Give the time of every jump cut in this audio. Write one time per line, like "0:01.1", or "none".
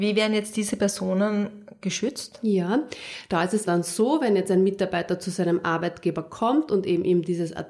0:03.7